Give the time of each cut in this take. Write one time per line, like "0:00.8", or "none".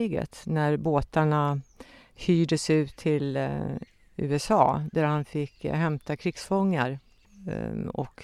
none